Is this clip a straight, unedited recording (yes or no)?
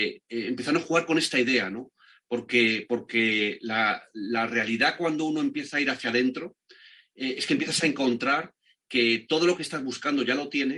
yes